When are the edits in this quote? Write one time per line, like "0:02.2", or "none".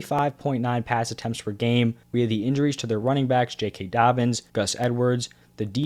0:02.0
0:04.5